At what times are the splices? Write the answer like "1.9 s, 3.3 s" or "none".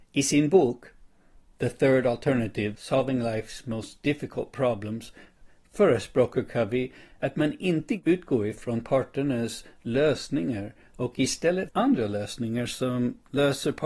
11.7 s